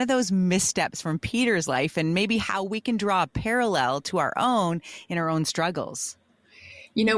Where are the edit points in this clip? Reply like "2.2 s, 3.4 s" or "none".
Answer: none